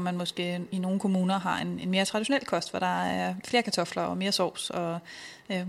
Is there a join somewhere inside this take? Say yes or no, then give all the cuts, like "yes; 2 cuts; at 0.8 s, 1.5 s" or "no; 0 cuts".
no; 0 cuts